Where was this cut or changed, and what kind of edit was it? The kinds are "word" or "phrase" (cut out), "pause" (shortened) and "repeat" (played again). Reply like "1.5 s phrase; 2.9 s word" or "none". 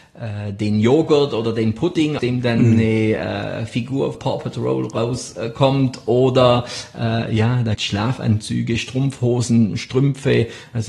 2.2 s word; 4.1 s phrase; 7.7 s word